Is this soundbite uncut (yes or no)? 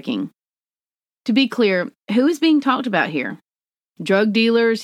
yes